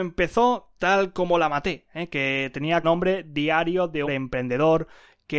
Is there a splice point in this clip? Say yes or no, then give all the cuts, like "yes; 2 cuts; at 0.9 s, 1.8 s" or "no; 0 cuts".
yes; 2 cuts; at 2.8 s, 4.1 s